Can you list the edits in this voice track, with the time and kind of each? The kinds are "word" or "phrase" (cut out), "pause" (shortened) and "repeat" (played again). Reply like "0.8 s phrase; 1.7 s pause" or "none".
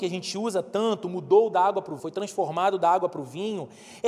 2.0 s word